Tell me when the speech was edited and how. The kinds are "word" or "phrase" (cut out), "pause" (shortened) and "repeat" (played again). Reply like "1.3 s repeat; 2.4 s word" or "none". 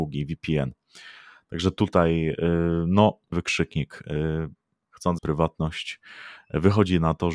3.3 s word; 5.2 s word